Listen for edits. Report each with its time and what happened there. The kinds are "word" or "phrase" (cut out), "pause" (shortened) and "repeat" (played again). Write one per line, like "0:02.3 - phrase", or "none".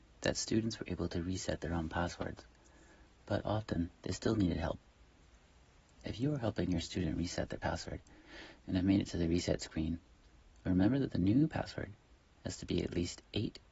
none